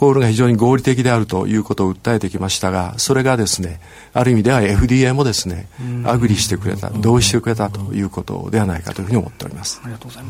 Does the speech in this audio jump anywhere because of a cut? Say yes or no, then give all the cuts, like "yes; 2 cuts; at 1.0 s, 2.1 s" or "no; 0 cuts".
no; 0 cuts